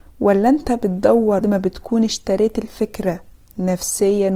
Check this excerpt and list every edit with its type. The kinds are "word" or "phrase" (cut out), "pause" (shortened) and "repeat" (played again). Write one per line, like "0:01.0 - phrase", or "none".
0:01.4 - word